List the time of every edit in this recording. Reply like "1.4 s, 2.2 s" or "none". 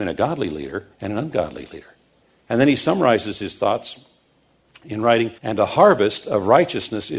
0.9 s, 2.2 s, 5.4 s